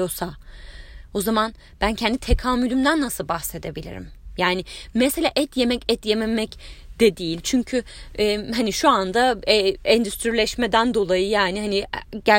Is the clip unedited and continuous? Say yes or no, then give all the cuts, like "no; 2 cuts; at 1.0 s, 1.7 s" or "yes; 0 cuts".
yes; 0 cuts